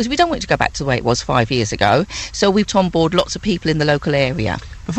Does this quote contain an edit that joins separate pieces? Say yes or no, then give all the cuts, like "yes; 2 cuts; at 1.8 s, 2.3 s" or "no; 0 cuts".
yes; 1 cut; at 2.7 s